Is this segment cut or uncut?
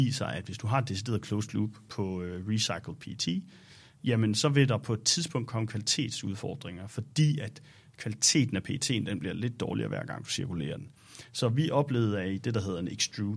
uncut